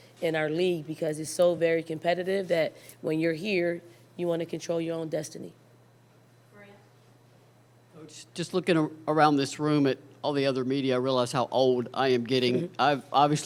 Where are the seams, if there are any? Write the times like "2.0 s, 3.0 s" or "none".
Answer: none